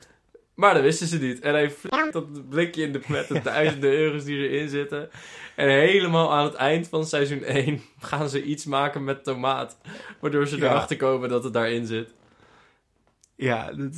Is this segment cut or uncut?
cut